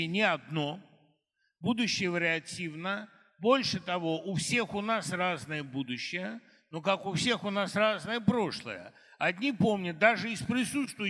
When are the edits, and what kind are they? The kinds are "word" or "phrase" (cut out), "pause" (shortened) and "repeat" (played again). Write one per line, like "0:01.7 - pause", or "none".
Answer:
none